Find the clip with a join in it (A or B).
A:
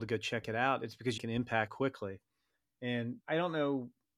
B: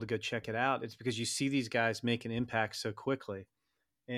A